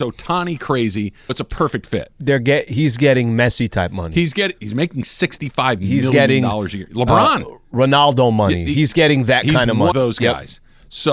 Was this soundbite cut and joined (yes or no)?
yes